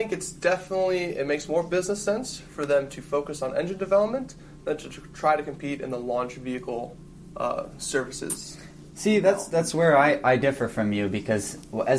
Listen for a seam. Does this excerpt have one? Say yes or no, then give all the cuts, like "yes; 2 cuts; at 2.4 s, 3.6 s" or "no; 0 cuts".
no; 0 cuts